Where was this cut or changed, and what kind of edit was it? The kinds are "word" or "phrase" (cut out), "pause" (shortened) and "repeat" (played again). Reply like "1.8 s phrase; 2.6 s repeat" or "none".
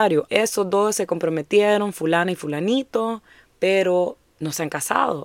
4.3 s pause